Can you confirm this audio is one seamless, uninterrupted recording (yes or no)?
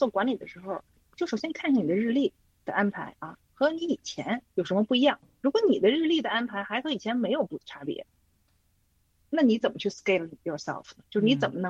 yes